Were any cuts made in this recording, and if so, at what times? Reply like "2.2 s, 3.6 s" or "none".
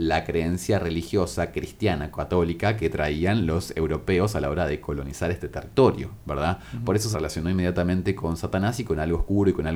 7.1 s